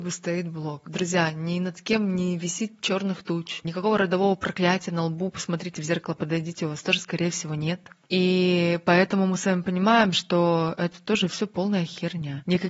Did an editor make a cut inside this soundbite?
no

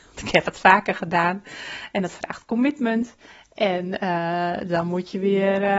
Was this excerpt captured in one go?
yes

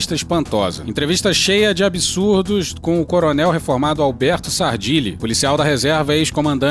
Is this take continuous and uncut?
yes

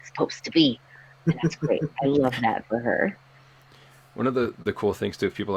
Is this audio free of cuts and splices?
yes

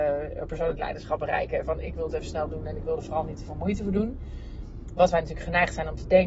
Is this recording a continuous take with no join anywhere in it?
yes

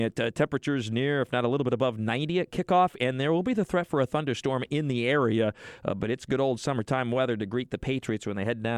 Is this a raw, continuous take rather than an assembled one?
yes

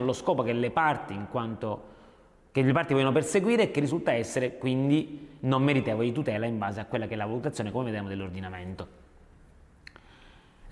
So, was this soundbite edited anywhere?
no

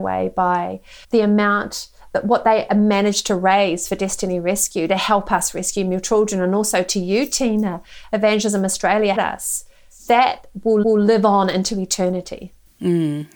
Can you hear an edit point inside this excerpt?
yes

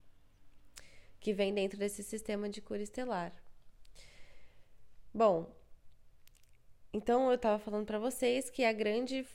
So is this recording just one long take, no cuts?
yes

